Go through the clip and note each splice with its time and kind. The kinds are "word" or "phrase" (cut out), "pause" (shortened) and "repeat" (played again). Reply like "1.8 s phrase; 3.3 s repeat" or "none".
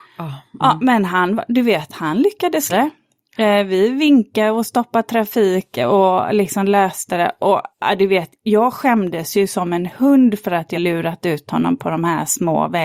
2.7 s word; 7.7 s pause; 10.7 s word